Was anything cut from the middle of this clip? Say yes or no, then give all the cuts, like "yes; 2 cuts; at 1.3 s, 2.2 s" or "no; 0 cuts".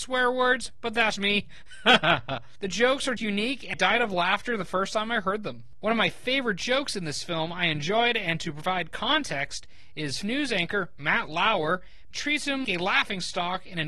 yes; 6 cuts; at 1.2 s, 3.2 s, 3.7 s, 10.2 s, 12.1 s, 12.6 s